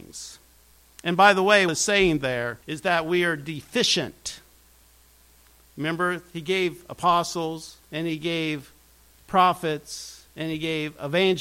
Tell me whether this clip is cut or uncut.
cut